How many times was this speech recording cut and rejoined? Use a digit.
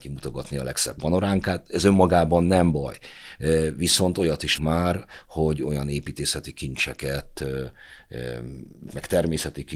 2